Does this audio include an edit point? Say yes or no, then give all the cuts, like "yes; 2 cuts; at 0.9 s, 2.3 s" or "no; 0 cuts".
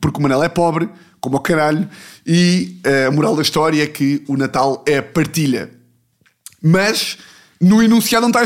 no; 0 cuts